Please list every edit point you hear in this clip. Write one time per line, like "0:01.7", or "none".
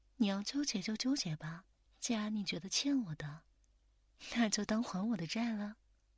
0:01.7